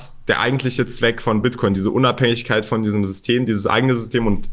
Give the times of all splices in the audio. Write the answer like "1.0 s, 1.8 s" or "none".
none